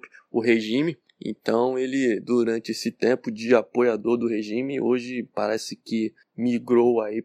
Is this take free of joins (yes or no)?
yes